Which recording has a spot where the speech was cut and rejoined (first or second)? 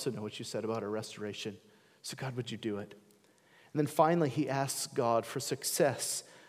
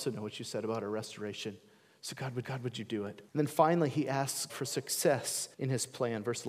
second